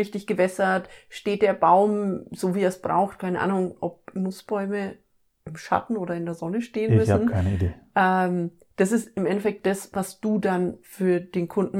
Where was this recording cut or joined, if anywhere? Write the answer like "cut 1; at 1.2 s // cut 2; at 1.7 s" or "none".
none